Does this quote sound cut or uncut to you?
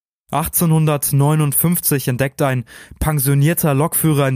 uncut